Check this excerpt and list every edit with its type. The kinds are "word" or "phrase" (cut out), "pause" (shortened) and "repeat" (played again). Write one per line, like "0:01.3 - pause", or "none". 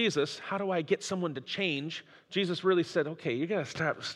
0:02.2 - pause